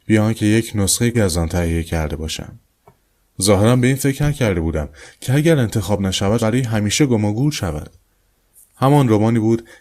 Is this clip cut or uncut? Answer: cut